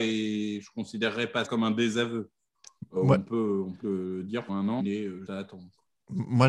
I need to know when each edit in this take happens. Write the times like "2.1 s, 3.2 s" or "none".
1.4 s, 3.0 s, 3.8 s, 4.5 s, 4.8 s, 5.3 s